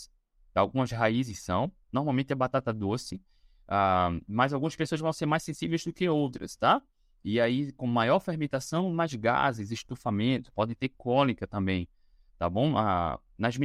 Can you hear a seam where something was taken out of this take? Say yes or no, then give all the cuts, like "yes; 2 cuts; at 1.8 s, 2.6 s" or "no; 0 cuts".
no; 0 cuts